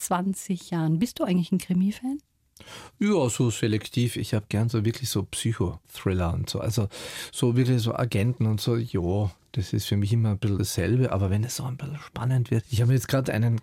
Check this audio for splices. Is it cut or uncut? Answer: uncut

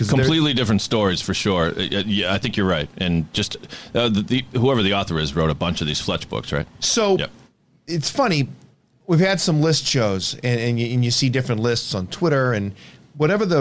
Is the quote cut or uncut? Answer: uncut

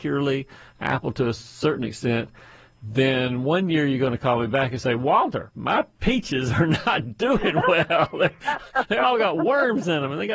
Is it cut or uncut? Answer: uncut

